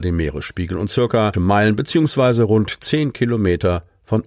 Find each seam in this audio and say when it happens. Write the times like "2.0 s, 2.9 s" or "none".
1.3 s